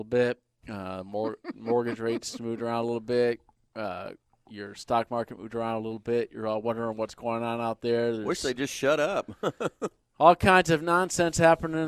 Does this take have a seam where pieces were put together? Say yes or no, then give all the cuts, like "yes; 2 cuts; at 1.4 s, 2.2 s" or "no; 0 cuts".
no; 0 cuts